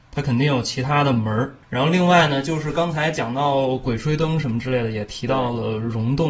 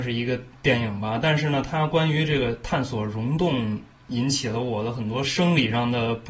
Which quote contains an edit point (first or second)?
first